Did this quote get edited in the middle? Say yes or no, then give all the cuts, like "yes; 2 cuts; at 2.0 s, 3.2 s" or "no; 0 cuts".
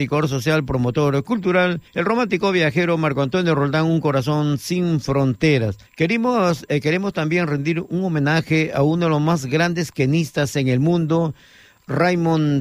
yes; 2 cuts; at 1.9 s, 5.9 s